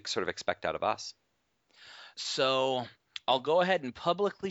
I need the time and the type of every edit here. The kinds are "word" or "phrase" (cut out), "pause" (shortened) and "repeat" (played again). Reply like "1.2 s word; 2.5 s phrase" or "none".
2.1 s pause

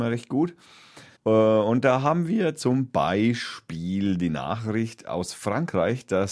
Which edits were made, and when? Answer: 1.1 s pause

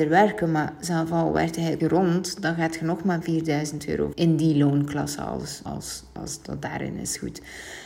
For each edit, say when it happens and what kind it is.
1.8 s word; 4.1 s word; 5.7 s word; 6.2 s word

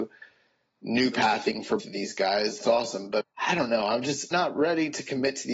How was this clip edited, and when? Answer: 1.1 s word; 1.8 s word; 2.6 s word; 3.2 s word; 4.3 s word

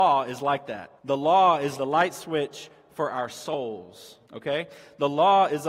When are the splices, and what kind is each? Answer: 1.0 s pause; 1.8 s word; 4.2 s pause

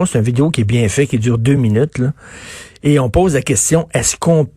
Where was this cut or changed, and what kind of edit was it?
none

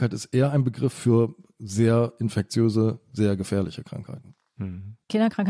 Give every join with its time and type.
none

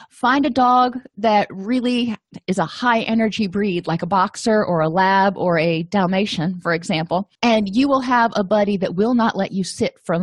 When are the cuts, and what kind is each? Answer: 7.3 s pause

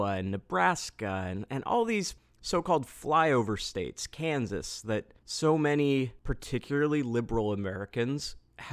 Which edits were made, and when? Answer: 5.2 s pause

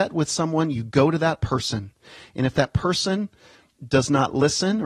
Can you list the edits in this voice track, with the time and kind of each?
none

